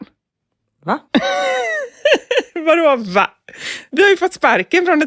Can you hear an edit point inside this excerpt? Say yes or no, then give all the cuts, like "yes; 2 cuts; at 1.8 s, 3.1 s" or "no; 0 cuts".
yes; 1 cut; at 1.1 s